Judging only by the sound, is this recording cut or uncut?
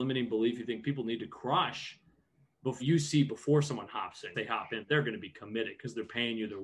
cut